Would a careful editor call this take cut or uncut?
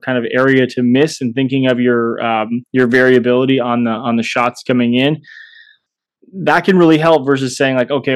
uncut